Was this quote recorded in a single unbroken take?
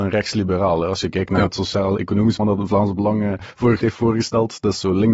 no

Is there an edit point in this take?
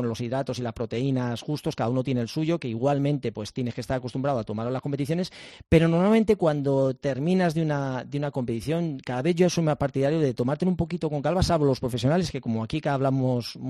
no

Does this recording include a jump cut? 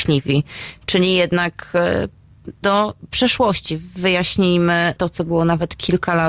yes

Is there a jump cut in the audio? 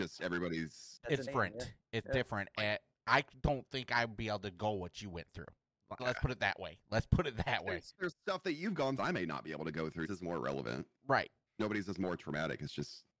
yes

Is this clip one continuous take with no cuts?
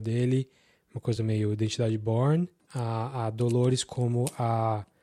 yes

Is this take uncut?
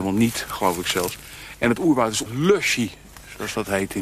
no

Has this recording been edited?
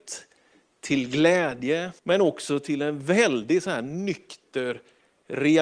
yes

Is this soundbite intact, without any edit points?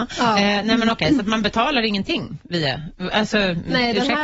yes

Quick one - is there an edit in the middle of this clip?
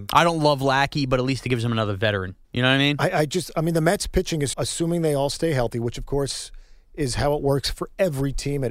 yes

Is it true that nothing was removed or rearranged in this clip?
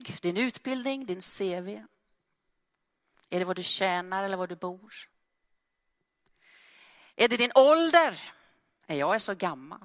yes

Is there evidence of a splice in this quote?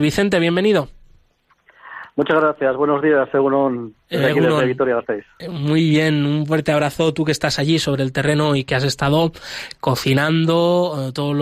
no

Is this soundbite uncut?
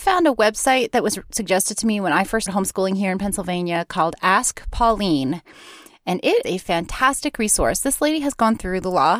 no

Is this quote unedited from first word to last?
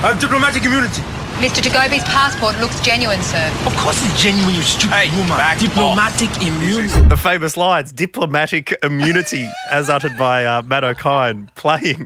yes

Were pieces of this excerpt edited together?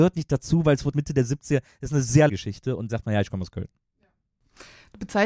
yes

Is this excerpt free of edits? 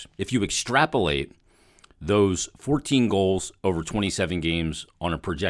yes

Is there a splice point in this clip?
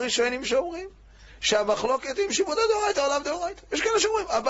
no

